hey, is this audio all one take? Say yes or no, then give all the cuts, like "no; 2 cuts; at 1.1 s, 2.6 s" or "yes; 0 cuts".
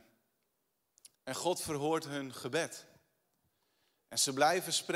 no; 1 cut; at 1.1 s